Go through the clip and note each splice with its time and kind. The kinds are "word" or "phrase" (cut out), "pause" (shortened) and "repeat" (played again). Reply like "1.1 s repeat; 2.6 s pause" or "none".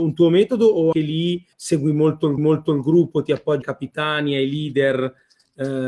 0.9 s word; 1.5 s pause; 2.4 s repeat; 3.6 s word